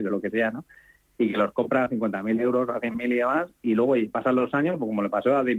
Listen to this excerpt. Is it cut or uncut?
uncut